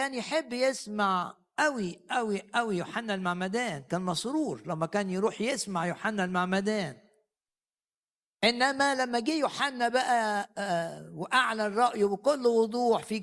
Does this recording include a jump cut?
no; 0 cuts

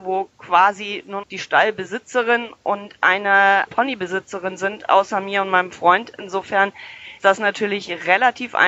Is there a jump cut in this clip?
yes; 3 cuts; at 1.2 s, 3.7 s, 7.2 s

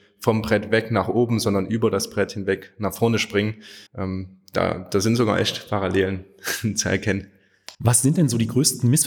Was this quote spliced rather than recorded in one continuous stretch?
yes; 2 cuts; at 3.9 s, 7.7 s

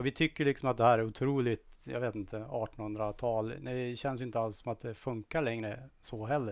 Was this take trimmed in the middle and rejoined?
yes; 1 cut; at 1.7 s

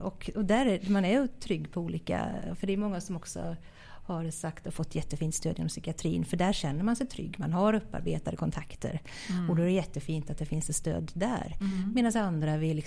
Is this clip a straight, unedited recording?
yes; 0 cuts

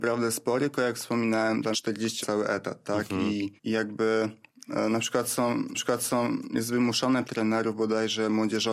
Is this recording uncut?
no; 5 cuts; at 1.7 s, 2.2 s, 3.6 s, 5.7 s, 7.2 s

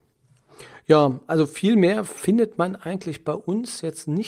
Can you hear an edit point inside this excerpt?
no; 0 cuts

